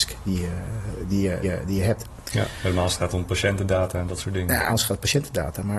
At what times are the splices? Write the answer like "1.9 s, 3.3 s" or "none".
1.4 s, 4.7 s